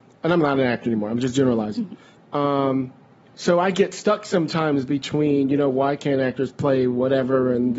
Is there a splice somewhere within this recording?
no; 0 cuts

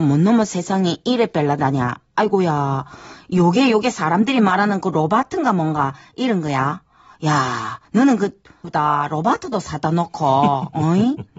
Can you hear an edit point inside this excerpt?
yes; 2 cuts; at 7.8 s, 8.6 s

